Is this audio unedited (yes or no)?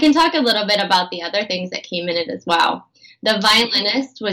yes